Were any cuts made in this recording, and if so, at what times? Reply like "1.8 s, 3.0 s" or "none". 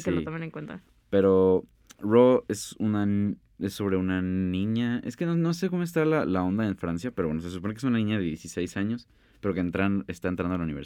none